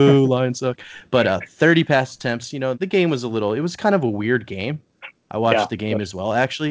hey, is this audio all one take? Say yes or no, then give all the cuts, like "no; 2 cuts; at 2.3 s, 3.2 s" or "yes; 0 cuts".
no; 1 cut; at 2.7 s